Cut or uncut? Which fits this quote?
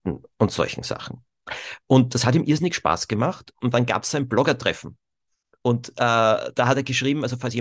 uncut